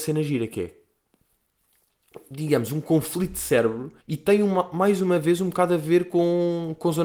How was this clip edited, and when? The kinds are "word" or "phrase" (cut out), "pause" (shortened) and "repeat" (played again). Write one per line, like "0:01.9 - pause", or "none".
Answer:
0:04.0 - pause